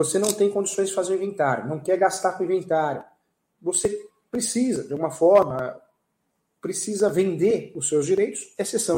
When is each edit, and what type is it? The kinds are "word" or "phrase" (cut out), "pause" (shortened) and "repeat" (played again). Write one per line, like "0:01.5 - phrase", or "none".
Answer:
none